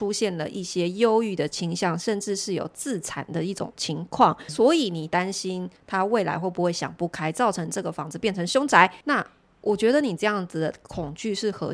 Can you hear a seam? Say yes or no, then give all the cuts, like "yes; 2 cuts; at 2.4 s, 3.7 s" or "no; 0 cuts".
yes; 2 cuts; at 4.5 s, 9.0 s